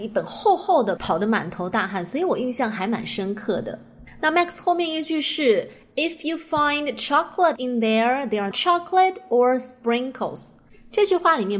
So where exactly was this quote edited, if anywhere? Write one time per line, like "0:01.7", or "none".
0:01.0
0:07.6
0:08.5

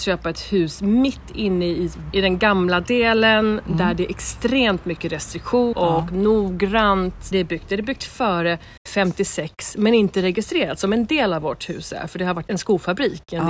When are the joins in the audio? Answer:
0:02.1
0:05.7
0:07.3
0:08.8
0:12.5

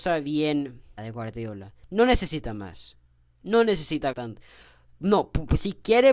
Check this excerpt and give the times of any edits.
0:01.0
0:01.8
0:04.1

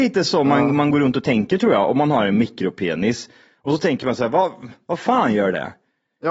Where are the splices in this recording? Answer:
none

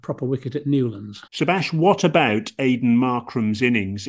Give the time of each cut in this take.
0:01.3

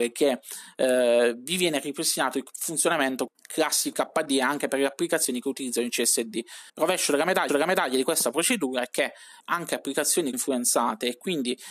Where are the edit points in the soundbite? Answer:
0:03.3
0:03.9
0:06.7
0:07.5
0:09.4
0:10.3

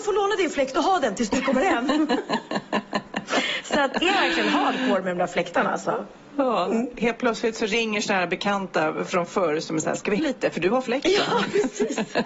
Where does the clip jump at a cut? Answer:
0:04.0
0:10.2

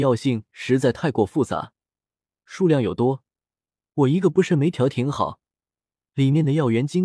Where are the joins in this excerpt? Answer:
none

